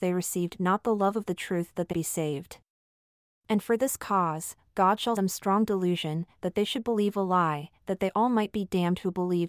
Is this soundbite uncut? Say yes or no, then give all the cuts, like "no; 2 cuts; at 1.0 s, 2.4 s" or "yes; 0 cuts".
no; 2 cuts; at 1.9 s, 5.2 s